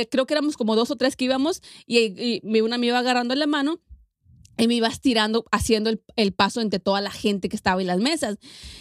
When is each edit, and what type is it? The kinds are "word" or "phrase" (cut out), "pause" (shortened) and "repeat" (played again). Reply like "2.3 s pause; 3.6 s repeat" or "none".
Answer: none